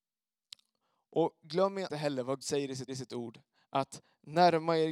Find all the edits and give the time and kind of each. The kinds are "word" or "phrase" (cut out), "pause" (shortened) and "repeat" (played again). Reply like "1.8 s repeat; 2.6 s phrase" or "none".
1.9 s word; 2.4 s word; 2.9 s repeat